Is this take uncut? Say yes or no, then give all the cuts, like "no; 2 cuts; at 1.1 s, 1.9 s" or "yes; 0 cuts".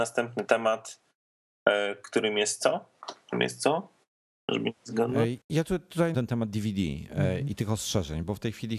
no; 2 cuts; at 5.4 s, 6.1 s